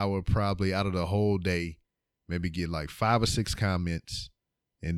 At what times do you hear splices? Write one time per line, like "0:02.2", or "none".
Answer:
none